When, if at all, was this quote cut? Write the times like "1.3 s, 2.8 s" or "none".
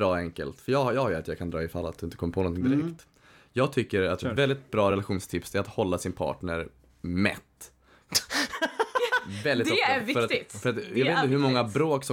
none